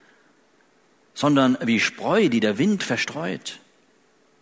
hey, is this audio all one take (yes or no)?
yes